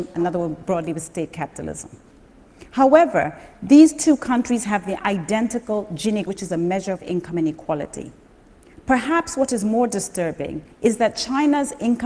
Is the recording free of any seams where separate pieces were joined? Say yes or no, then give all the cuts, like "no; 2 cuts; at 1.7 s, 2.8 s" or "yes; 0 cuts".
no; 2 cuts; at 6.3 s, 10.7 s